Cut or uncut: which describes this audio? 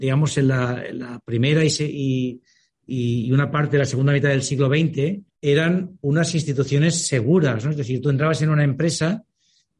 cut